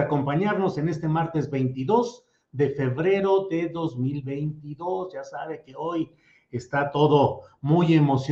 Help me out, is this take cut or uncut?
uncut